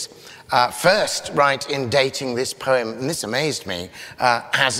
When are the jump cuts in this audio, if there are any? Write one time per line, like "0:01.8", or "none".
none